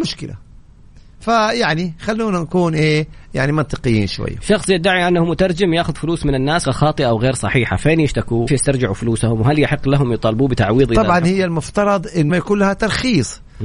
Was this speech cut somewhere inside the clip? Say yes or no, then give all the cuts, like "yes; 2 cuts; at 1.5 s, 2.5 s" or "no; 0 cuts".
yes; 3 cuts; at 6.6 s, 8.5 s, 12.3 s